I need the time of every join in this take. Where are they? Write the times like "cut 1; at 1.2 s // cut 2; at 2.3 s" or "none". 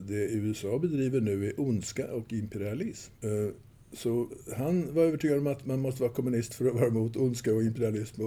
cut 1; at 3.2 s